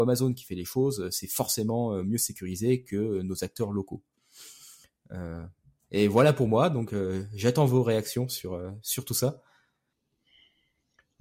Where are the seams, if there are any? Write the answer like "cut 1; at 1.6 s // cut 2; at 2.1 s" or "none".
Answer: none